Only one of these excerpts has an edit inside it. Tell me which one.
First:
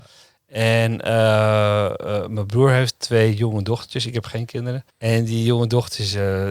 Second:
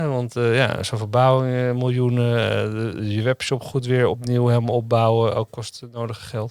first; 1 cut; at 4.9 s

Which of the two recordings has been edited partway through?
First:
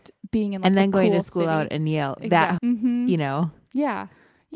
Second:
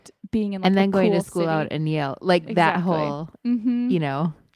first; 2 cuts; at 2.2 s, 2.6 s

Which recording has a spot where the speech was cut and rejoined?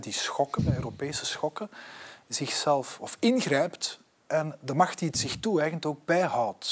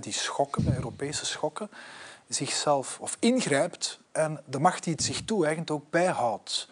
second; 1 cut; at 4.1 s

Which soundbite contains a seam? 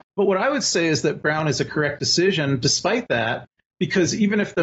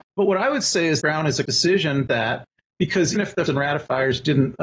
second; 5 cuts; at 1.0 s, 1.5 s, 2.1 s, 3.2 s, 3.5 s

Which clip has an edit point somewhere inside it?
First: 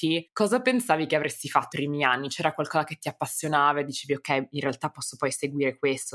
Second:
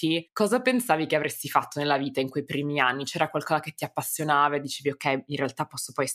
first; 1 cut; at 1.7 s

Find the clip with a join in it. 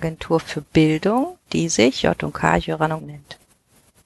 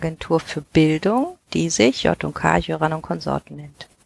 first; 1 cut; at 3.0 s

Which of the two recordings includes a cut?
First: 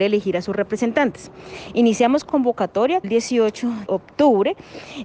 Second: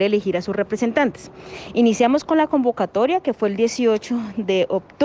first; 3 cuts; at 2.3 s, 3.0 s, 3.9 s

